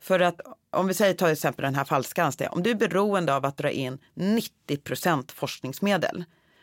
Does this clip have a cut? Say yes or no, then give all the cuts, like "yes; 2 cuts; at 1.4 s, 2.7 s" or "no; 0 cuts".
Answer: no; 0 cuts